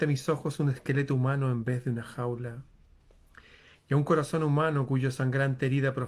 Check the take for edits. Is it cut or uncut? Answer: uncut